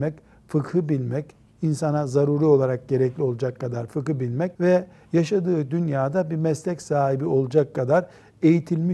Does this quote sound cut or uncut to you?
cut